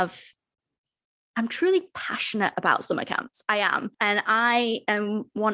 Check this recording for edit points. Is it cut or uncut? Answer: cut